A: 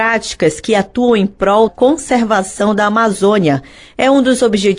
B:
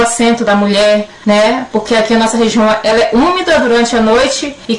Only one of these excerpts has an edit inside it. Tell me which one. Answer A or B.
A